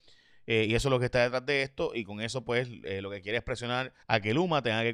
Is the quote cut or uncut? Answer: cut